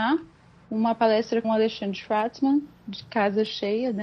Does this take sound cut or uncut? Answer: cut